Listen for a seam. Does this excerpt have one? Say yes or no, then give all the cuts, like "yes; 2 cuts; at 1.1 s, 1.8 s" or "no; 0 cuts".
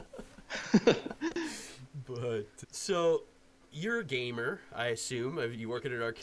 yes; 1 cut; at 2.6 s